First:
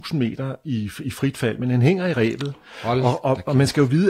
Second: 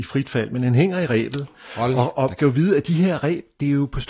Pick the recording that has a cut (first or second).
second